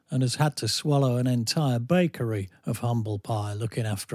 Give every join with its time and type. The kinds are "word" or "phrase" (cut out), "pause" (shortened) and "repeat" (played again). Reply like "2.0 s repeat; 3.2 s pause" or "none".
none